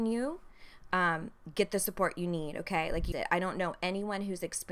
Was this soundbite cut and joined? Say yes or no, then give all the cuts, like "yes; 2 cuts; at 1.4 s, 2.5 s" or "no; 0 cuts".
yes; 1 cut; at 3.1 s